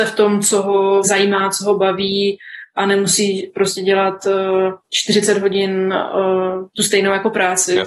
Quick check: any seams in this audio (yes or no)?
yes